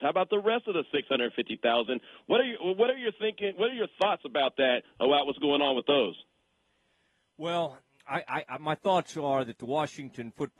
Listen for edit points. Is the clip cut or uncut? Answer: uncut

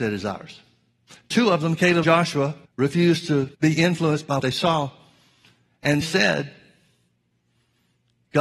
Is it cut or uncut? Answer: cut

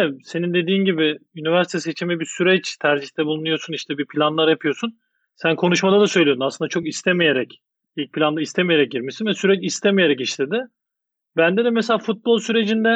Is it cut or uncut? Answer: uncut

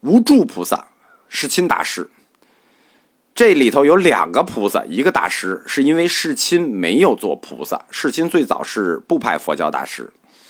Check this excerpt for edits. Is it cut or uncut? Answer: uncut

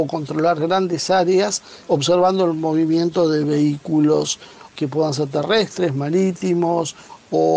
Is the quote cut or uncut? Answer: cut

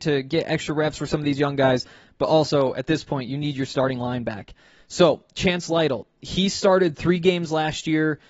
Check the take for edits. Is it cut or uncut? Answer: uncut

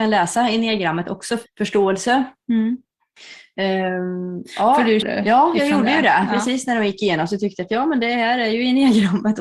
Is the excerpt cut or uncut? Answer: cut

